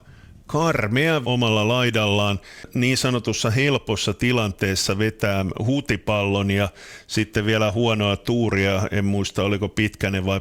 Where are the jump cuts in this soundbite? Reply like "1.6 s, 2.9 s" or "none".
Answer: 1.2 s